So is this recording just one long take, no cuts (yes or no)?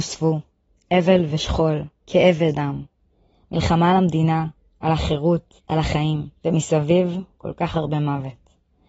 no